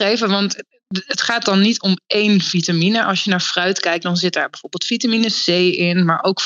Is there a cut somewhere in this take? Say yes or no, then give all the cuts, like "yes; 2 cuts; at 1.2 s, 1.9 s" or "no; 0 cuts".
no; 0 cuts